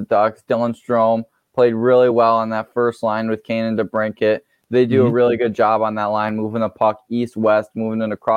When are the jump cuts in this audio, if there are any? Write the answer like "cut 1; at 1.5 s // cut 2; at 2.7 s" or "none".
none